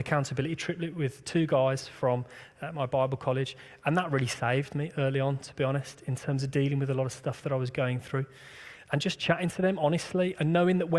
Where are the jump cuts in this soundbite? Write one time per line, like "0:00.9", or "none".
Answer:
none